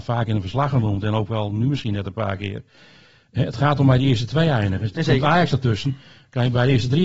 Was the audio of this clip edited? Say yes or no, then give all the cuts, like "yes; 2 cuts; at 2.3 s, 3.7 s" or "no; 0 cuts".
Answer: no; 0 cuts